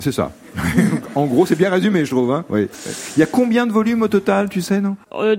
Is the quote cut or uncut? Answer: uncut